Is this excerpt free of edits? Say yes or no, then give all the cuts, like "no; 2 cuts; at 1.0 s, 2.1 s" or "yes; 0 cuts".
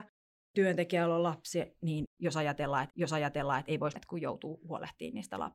no; 2 cuts; at 2.9 s, 4.0 s